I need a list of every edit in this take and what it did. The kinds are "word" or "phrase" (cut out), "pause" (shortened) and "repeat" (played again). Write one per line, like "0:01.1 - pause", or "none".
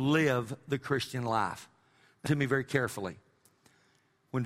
0:02.3 - word